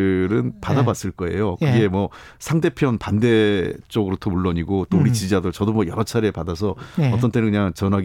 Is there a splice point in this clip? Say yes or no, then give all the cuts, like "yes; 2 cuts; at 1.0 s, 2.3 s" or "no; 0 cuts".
no; 0 cuts